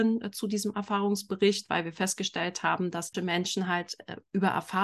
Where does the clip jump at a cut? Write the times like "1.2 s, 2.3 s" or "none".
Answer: 3.1 s